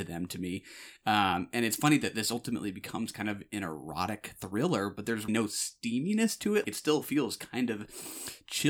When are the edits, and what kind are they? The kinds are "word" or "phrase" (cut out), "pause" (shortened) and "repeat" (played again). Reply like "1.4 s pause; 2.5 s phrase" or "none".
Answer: 5.3 s word; 6.6 s word

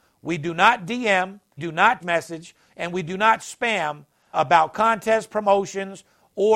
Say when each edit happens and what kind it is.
1.6 s word; 2.0 s word; 4.3 s word

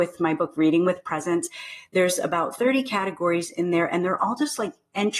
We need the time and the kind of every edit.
none

